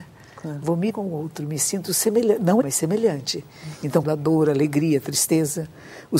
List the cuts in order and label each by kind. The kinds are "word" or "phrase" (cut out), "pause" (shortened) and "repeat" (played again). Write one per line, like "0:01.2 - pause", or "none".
0:00.9 - word
0:02.6 - word
0:04.0 - word